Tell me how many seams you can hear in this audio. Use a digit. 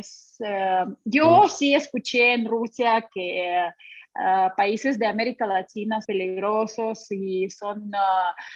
1